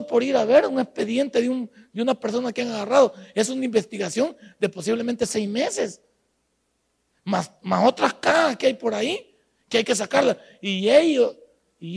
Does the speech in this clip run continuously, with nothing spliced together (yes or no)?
yes